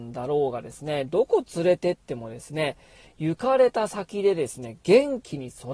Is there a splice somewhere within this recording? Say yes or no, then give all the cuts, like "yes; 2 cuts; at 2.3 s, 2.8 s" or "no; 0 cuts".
no; 0 cuts